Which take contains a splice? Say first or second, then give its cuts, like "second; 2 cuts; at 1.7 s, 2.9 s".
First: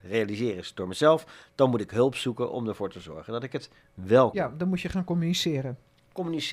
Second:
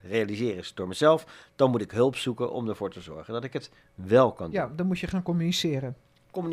first; 1 cut; at 4.3 s